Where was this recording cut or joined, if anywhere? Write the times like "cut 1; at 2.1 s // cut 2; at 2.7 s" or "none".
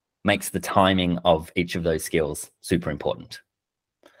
none